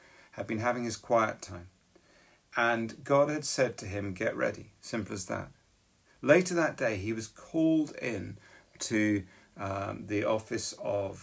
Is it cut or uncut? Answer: uncut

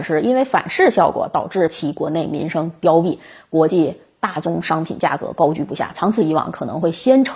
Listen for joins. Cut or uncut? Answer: uncut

